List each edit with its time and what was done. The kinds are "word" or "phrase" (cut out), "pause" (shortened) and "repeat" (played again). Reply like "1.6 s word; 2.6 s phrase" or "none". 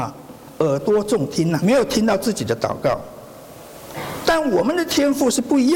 1.6 s word